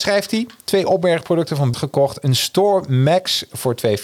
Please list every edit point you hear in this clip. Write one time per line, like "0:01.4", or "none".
0:01.7